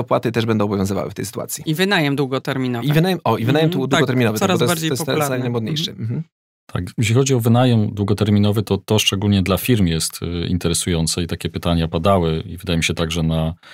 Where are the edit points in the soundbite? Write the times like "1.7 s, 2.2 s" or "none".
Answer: 6.5 s